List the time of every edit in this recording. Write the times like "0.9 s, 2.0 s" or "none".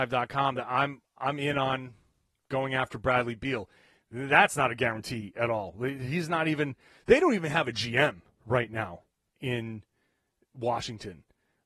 none